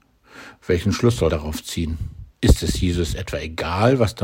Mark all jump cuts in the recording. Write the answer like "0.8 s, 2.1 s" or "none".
1.3 s, 2.3 s